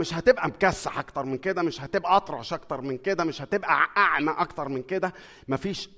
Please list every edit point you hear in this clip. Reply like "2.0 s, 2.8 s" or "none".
none